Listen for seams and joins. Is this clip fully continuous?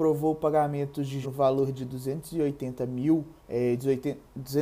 no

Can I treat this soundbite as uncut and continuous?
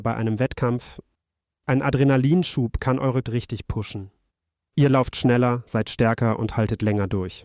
no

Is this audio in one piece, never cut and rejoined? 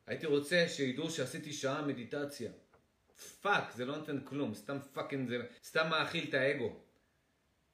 no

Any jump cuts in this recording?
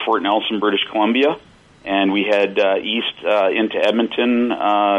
no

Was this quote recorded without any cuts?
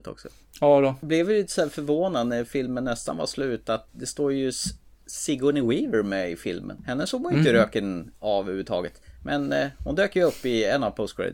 yes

